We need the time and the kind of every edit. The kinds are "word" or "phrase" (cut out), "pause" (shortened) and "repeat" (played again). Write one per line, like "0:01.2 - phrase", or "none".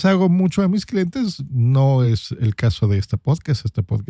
none